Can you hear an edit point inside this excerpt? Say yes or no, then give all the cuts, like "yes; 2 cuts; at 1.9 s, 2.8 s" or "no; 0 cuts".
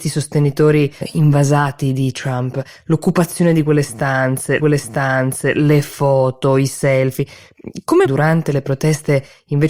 yes; 3 cuts; at 1.0 s, 4.6 s, 8.0 s